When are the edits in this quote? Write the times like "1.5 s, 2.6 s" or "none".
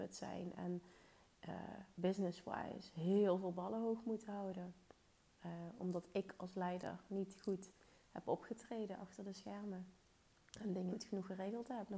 10.9 s